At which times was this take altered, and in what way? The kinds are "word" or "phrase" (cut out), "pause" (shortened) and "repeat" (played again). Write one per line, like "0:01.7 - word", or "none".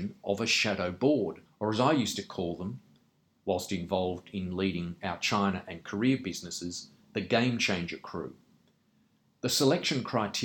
0:01.5 - pause

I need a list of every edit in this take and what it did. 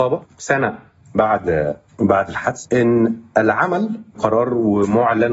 0:02.6 - word
0:04.1 - word

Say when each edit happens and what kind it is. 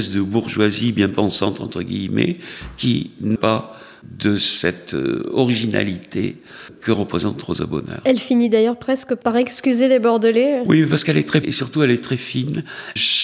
0:03.4 - word
0:11.4 - word

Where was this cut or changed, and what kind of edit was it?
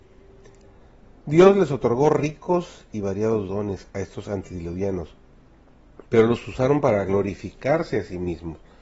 0:06.1 - pause

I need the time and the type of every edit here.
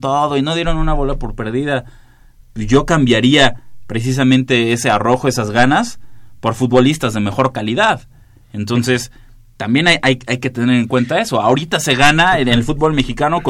none

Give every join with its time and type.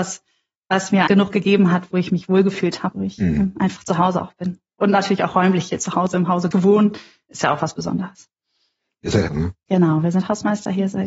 0:01.1 - word
0:02.9 - word
0:06.5 - word
0:09.3 - word

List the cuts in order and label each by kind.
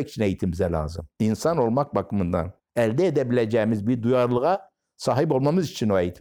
0:01.1 - pause
0:02.6 - pause

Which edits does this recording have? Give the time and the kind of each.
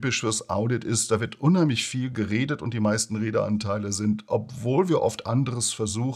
none

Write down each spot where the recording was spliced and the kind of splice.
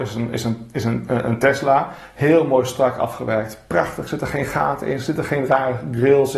none

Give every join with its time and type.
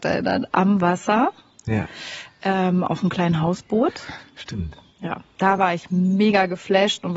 none

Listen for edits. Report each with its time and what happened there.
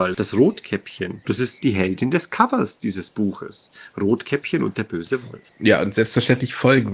0:05.5 - pause

